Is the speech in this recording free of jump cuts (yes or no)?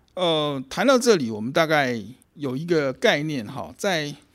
no